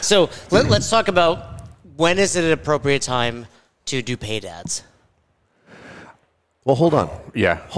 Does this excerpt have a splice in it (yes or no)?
no